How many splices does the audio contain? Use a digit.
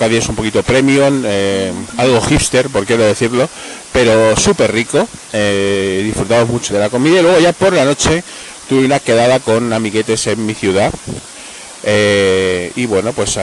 2